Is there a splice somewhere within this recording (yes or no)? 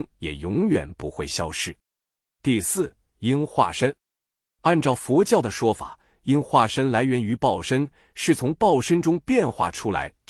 no